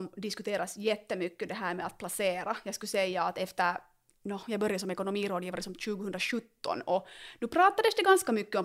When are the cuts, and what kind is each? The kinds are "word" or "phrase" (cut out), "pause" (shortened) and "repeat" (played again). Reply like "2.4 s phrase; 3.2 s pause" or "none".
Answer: none